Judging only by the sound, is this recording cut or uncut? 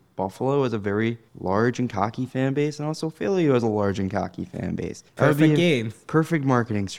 cut